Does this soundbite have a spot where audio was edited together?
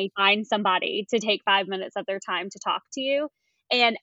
no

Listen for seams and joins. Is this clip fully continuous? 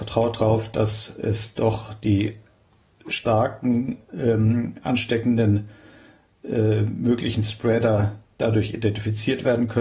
yes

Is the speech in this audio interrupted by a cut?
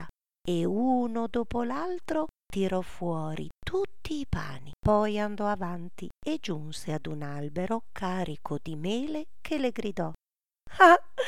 yes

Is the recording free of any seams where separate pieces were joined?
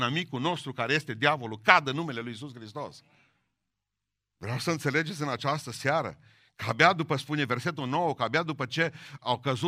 yes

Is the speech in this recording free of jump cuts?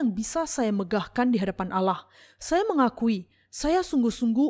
yes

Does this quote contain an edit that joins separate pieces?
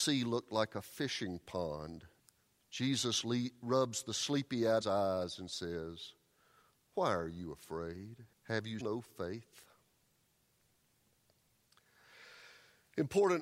yes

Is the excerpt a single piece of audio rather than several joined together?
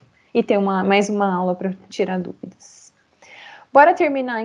yes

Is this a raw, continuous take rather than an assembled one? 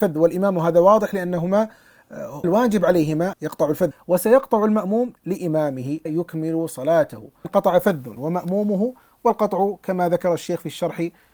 no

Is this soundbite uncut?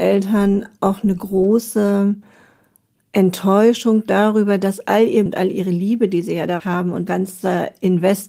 no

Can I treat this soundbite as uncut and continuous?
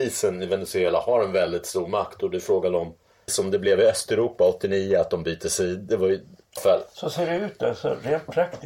no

